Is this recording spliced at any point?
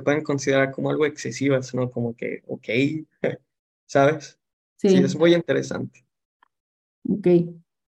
no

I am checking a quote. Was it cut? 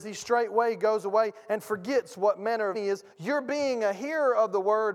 yes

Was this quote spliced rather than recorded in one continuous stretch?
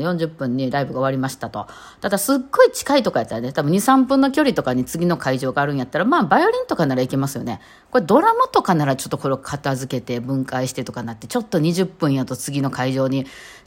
no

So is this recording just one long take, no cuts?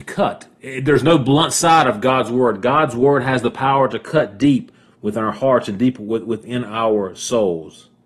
yes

